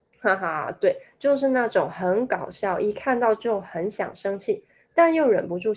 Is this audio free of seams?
yes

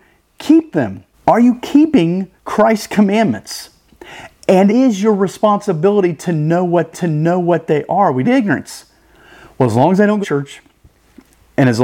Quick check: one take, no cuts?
no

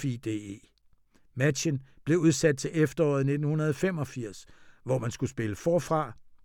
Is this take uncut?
yes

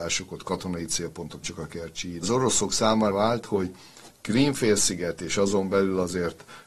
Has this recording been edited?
yes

